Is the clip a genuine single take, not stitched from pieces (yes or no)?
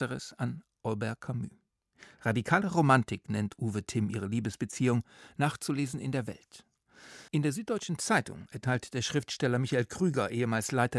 no